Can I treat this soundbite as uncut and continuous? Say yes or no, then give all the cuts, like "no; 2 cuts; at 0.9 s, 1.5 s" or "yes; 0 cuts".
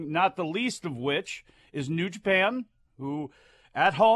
yes; 0 cuts